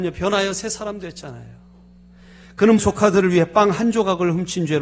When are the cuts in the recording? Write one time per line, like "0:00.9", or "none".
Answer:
0:02.8